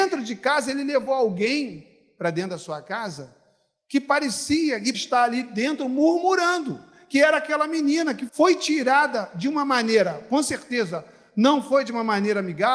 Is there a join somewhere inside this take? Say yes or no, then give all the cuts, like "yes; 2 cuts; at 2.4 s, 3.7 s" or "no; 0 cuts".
yes; 2 cuts; at 4.9 s, 8.3 s